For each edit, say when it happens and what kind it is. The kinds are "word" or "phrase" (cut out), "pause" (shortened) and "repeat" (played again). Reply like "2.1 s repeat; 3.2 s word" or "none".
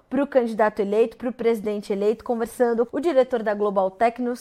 2.9 s word